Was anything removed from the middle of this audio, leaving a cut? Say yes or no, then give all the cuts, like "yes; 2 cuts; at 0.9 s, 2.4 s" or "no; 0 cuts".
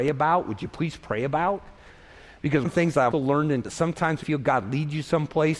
yes; 4 cuts; at 2.6 s, 3.1 s, 3.6 s, 4.2 s